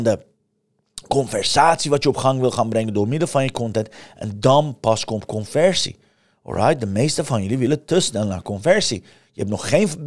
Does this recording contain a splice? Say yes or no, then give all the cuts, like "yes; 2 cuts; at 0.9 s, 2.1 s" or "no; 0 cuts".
no; 0 cuts